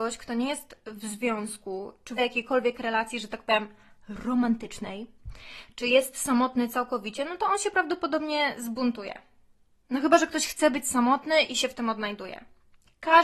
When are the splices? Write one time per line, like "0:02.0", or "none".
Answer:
0:02.2